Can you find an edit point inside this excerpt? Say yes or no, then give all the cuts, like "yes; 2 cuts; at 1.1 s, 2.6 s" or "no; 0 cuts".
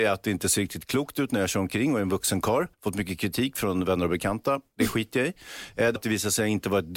yes; 2 cuts; at 2.7 s, 6.0 s